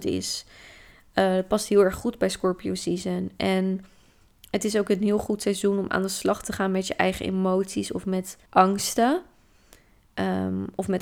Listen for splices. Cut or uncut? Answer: cut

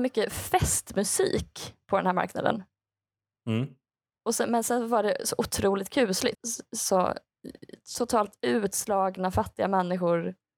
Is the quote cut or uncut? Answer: cut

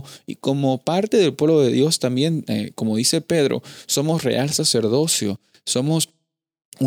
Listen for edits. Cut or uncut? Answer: uncut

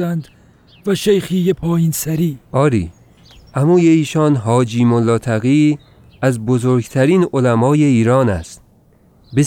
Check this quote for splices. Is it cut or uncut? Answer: uncut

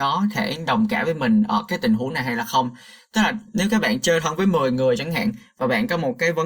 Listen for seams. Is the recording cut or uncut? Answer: uncut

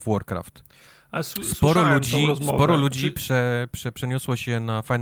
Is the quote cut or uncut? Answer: uncut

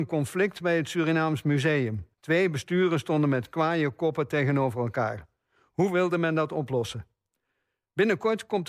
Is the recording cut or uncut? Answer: cut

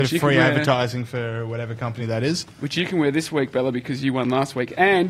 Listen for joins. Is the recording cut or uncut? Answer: uncut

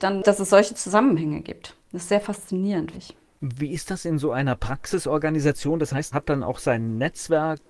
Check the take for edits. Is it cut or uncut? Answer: cut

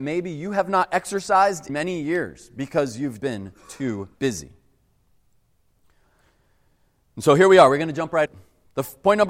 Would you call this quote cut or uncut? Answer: cut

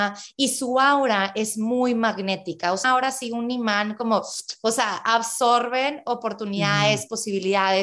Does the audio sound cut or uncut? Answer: cut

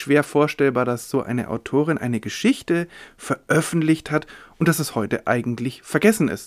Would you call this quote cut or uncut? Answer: uncut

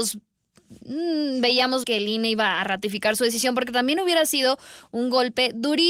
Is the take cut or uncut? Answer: cut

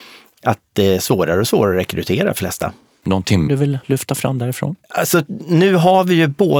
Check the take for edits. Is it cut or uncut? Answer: cut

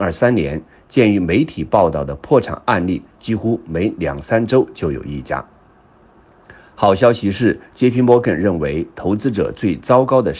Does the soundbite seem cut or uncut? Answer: uncut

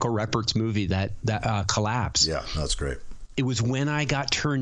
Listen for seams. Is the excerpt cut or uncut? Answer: uncut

